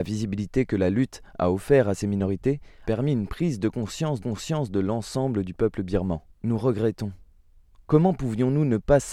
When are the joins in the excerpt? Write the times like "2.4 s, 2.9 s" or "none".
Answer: 2.8 s, 4.2 s, 6.3 s